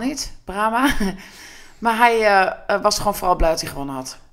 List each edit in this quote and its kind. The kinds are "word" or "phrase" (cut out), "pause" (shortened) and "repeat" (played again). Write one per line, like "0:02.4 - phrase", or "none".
none